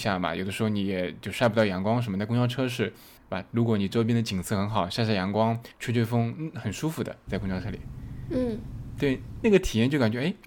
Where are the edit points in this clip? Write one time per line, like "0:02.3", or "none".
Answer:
0:03.2
0:05.7